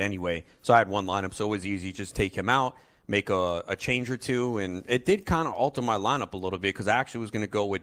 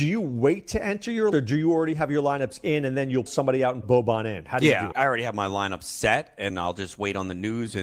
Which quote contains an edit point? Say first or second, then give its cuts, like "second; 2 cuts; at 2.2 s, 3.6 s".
second; 5 cuts; at 1.3 s, 3.3 s, 3.8 s, 4.9 s, 6.5 s